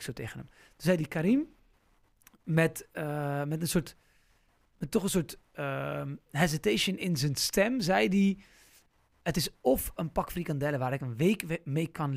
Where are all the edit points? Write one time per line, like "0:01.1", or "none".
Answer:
none